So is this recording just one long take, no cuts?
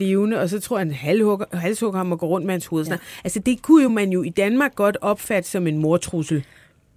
yes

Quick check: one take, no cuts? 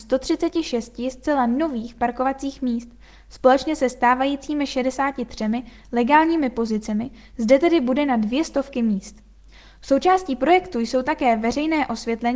yes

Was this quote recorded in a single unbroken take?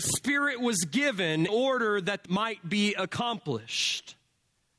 no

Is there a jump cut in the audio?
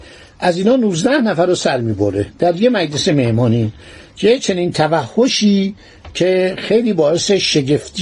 no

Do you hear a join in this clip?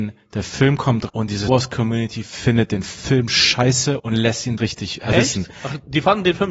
yes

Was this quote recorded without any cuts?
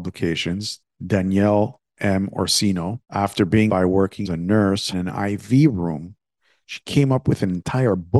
no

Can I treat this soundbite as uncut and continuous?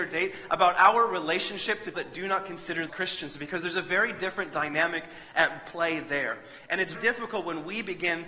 no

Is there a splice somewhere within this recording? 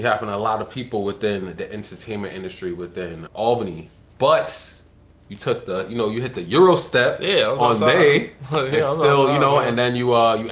yes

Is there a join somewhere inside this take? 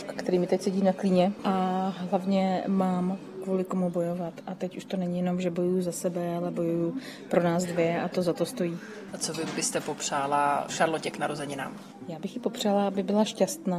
no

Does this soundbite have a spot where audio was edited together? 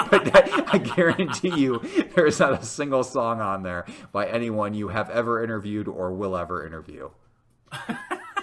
no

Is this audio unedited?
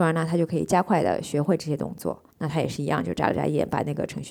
no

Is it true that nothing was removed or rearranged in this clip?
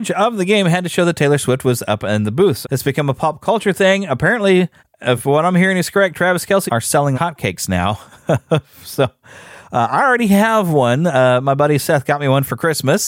no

